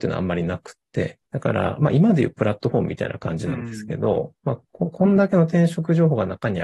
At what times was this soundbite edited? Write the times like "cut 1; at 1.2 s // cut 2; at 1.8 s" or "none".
cut 1; at 1.2 s